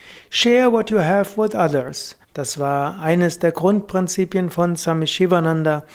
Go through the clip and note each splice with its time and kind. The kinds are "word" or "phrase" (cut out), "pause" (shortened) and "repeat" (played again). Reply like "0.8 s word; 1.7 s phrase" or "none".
2.2 s pause